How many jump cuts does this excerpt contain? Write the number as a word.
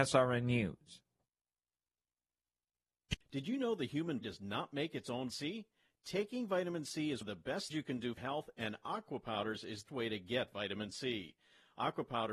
six